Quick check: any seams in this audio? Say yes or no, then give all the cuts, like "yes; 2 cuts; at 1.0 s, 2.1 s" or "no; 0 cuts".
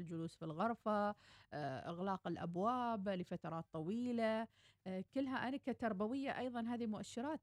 no; 0 cuts